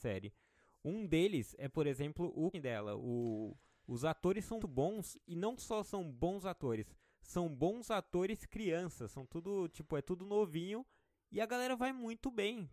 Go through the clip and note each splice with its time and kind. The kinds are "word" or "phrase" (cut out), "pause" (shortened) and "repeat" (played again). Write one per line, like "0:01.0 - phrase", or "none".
0:02.5 - word
0:04.6 - word